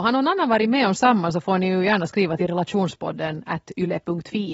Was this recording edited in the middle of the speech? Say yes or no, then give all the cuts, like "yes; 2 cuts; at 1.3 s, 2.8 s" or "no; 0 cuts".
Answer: no; 0 cuts